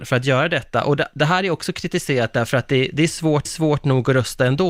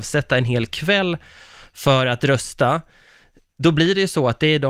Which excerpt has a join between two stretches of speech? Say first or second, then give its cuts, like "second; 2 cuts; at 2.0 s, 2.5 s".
first; 1 cut; at 3.5 s